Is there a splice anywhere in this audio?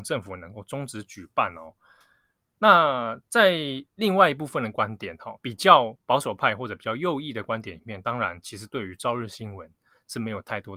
yes; 1 cut; at 5.4 s

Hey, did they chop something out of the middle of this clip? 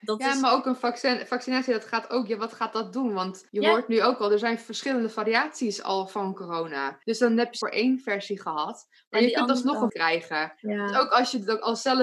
yes; 5 cuts; at 3.5 s, 7.0 s, 7.6 s, 9.9 s, 10.6 s

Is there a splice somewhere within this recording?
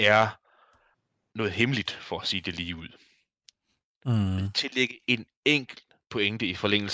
no; 0 cuts

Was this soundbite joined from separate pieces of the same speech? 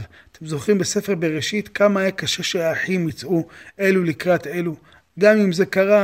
no; 0 cuts

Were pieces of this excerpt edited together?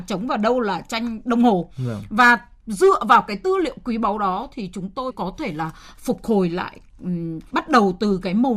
yes; 2 cuts; at 5.1 s, 7.5 s

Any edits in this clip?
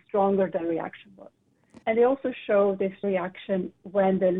yes; 2 cuts; at 1.8 s, 3.0 s

